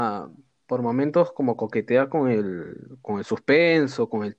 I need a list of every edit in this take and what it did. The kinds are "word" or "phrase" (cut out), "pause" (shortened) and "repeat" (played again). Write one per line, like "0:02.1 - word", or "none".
none